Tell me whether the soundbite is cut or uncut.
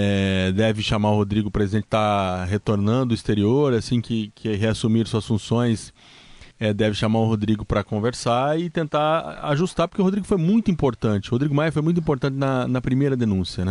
cut